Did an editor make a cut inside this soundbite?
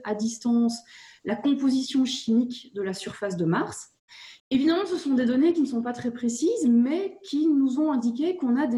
yes; 1 cut; at 4.4 s

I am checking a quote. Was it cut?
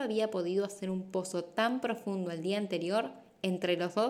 no; 0 cuts

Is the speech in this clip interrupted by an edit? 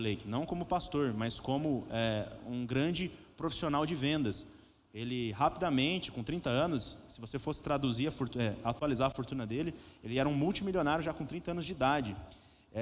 no; 0 cuts

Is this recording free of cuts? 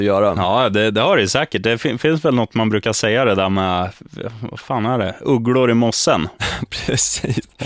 yes; 0 cuts

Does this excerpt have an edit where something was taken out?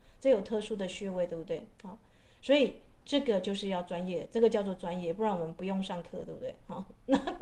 no; 0 cuts

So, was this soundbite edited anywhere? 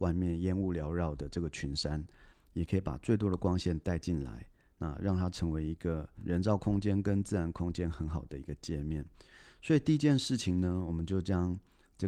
no; 0 cuts

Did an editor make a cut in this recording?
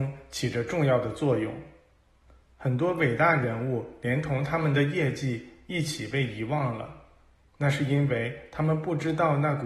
no; 0 cuts

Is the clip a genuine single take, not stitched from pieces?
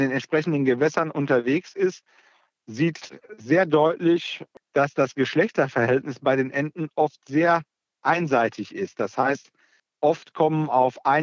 yes; 0 cuts

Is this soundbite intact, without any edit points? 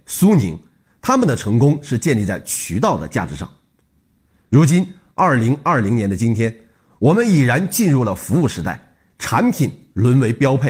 yes; 0 cuts

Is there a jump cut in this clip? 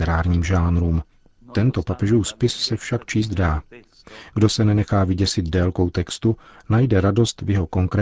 no; 0 cuts

